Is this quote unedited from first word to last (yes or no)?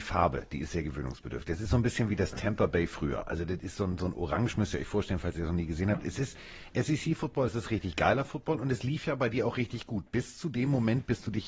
yes